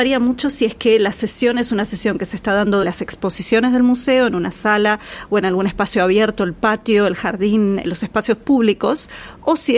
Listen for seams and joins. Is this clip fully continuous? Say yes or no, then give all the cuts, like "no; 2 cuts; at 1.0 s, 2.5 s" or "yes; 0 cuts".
no; 2 cuts; at 2.8 s, 7.8 s